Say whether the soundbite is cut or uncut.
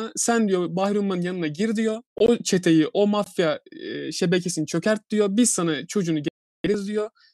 cut